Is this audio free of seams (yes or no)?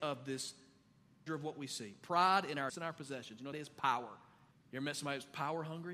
no